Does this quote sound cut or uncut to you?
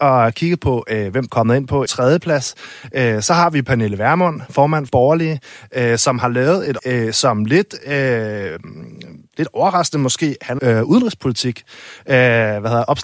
cut